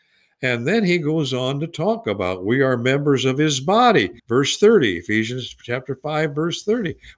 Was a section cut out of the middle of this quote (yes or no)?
yes